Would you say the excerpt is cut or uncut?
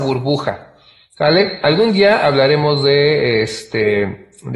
uncut